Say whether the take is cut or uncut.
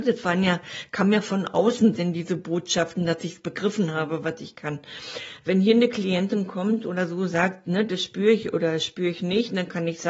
uncut